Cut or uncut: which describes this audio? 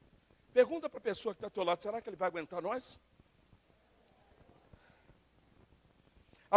uncut